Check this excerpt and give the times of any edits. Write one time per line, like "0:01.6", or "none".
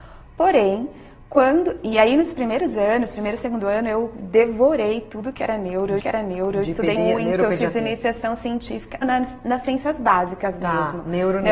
0:06.0
0:07.0
0:09.0